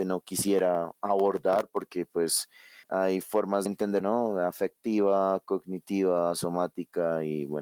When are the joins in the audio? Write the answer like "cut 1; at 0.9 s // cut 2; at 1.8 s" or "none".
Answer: cut 1; at 2.8 s // cut 2; at 3.7 s // cut 3; at 4.0 s